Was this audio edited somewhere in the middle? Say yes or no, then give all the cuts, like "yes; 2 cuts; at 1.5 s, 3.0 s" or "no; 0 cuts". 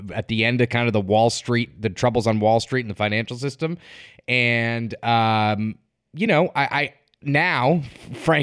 no; 0 cuts